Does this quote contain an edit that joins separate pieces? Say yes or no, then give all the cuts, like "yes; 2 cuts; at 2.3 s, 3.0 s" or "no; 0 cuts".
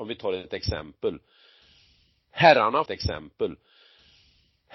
yes; 1 cut; at 2.9 s